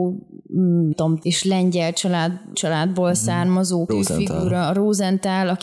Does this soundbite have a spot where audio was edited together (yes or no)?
yes